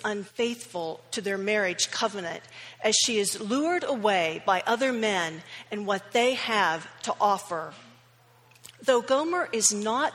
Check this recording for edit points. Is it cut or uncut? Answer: uncut